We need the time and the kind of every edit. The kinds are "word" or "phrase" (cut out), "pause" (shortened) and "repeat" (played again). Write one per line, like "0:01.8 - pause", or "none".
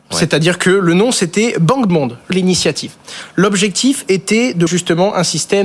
0:01.9 - phrase
0:02.3 - word
0:04.7 - word